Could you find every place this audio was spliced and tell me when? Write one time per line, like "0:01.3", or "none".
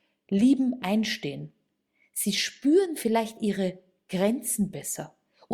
none